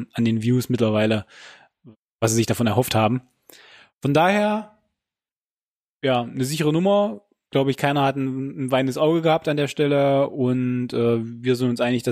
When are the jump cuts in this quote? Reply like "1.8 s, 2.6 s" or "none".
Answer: none